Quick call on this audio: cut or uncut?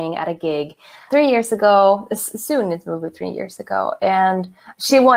cut